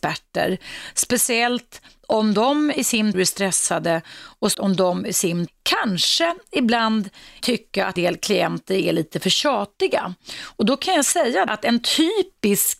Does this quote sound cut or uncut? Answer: cut